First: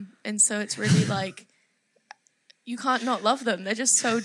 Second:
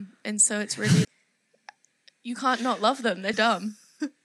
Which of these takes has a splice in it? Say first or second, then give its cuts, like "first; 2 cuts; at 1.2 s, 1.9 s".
second; 2 cuts; at 1.0 s, 3.3 s